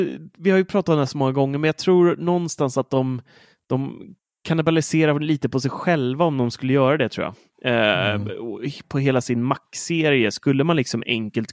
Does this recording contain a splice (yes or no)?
no